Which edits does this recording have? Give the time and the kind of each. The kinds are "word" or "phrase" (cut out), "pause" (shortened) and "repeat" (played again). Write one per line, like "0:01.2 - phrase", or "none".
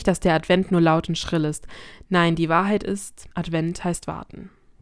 0:03.3 - pause